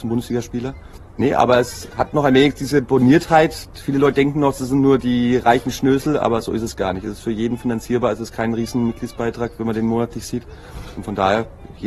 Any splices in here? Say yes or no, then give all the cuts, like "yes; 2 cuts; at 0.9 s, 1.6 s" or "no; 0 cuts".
no; 0 cuts